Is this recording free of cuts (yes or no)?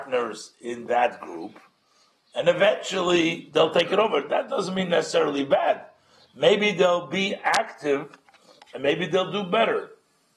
yes